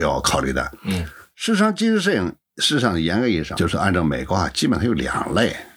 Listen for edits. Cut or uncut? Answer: cut